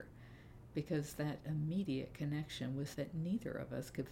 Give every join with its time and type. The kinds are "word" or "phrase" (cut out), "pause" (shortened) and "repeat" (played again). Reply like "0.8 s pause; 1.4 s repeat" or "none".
2.9 s phrase